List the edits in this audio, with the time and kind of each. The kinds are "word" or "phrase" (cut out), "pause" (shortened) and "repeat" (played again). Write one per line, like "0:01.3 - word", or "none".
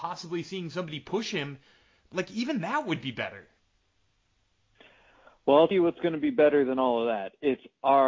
0:05.7 - word